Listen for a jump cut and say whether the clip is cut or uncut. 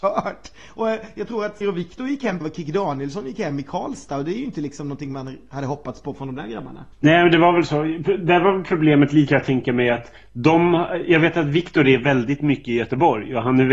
cut